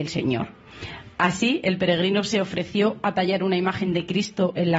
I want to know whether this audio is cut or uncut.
uncut